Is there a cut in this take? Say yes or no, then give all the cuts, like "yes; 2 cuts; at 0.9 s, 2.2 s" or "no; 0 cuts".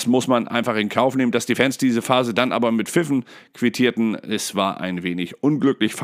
no; 0 cuts